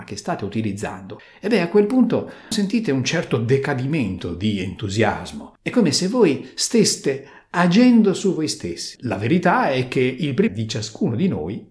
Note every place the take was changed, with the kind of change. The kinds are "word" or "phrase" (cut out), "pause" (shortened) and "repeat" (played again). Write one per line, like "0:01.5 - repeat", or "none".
0:02.5 - word
0:10.5 - word